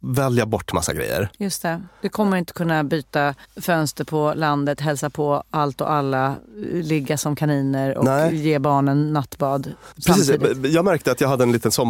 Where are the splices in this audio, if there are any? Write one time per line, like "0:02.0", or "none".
0:01.3
0:03.4
0:09.9